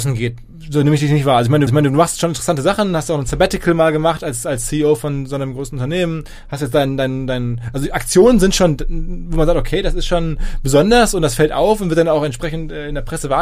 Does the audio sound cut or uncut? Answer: cut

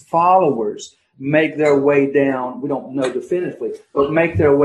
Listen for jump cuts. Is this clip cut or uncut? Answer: uncut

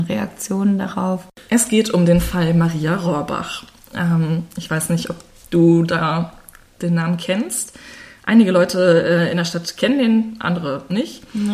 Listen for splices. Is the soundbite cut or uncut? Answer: uncut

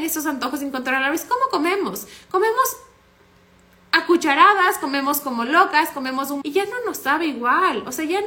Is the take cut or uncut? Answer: cut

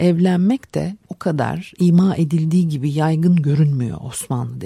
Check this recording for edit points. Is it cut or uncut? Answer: cut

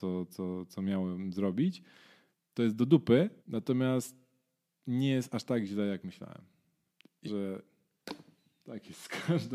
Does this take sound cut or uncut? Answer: cut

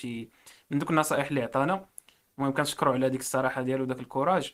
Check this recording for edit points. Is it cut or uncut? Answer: uncut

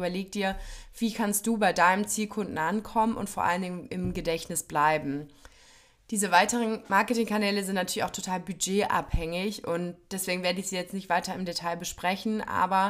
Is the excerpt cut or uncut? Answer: uncut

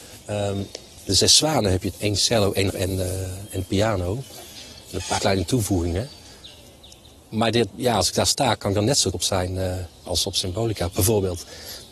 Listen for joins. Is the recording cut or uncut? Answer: cut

